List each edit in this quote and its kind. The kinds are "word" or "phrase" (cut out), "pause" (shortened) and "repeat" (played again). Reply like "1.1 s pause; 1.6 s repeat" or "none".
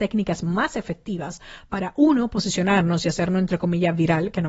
none